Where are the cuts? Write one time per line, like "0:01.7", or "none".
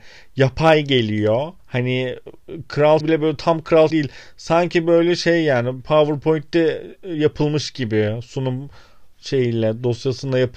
0:01.6
0:03.0
0:03.9